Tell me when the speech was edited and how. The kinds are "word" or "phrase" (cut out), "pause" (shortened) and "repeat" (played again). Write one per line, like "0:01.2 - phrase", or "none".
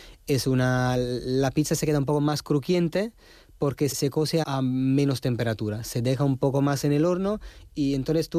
0:03.9 - word
0:04.4 - word